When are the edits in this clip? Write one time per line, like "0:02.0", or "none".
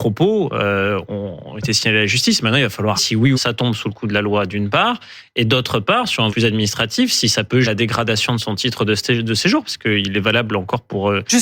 0:03.0
0:03.3
0:06.3
0:07.6